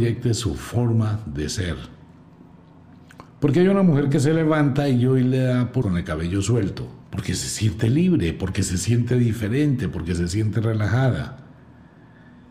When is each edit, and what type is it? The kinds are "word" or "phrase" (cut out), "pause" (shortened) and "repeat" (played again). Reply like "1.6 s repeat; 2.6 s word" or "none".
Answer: 3.3 s pause; 5.8 s word; 7.0 s pause